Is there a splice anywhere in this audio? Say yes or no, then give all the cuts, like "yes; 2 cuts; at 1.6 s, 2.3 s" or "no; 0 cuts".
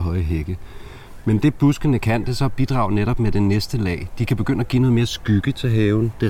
no; 0 cuts